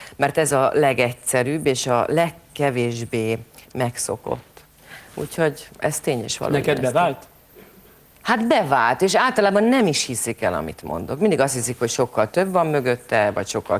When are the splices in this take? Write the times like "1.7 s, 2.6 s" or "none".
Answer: none